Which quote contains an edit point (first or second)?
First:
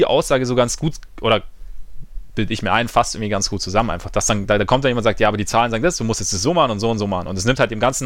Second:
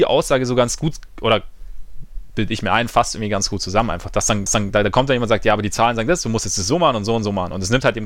second